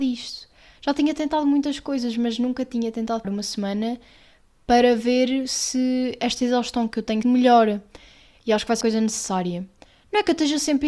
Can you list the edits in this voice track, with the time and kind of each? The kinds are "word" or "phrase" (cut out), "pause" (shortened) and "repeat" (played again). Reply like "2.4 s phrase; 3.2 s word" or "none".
3.2 s word; 7.2 s word; 8.8 s word